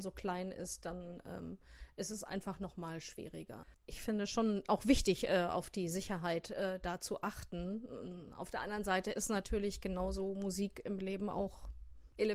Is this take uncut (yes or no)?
yes